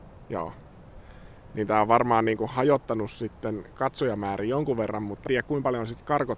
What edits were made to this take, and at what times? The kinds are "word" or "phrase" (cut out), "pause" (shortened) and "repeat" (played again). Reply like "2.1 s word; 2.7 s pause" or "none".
5.3 s word